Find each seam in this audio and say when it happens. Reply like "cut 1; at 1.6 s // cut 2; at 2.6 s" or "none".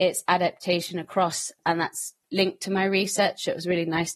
cut 1; at 1.6 s // cut 2; at 2.2 s